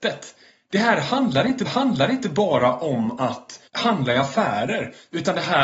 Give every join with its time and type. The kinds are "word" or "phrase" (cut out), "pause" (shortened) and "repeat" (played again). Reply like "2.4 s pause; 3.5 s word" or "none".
1.7 s repeat; 3.7 s pause